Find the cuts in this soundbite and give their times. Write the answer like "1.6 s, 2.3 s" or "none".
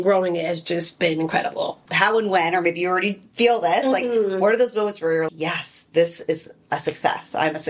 5.3 s